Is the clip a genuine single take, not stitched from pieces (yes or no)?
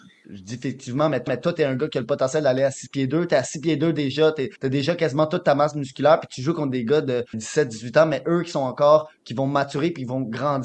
no